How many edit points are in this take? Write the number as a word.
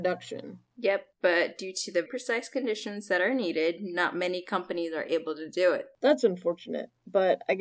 two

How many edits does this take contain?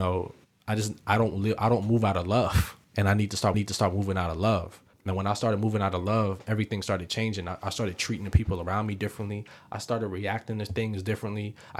three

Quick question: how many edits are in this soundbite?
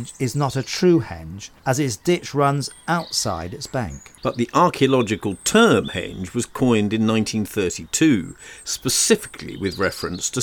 two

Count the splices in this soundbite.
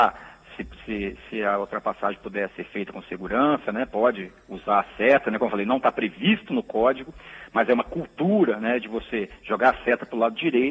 zero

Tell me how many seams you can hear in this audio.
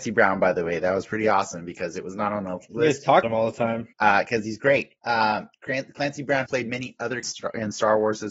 five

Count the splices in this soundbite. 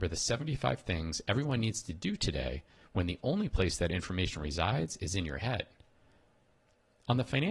zero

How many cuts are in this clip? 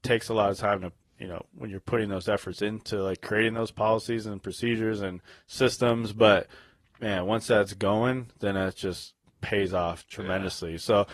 zero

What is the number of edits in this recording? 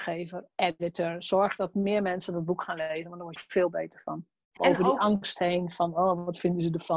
two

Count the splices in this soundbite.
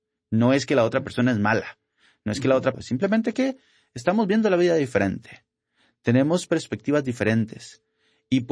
one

